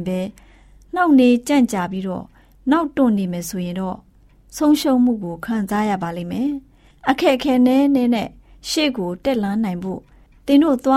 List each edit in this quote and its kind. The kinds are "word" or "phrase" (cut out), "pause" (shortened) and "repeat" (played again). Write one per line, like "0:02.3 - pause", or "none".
none